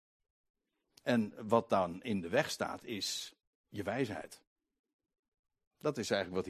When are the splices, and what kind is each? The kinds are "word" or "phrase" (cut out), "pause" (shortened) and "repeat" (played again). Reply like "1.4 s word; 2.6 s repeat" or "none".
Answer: none